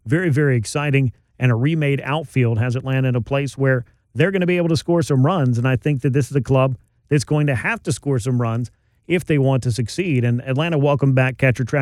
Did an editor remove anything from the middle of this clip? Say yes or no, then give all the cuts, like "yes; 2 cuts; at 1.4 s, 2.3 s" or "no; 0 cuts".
no; 0 cuts